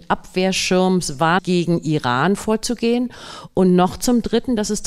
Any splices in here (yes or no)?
no